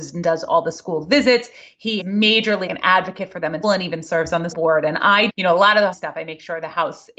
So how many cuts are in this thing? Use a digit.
6